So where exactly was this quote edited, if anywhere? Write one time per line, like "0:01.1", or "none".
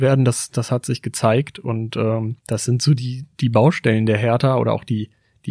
0:02.4